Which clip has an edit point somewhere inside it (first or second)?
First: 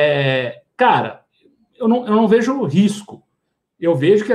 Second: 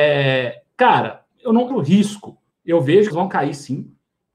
second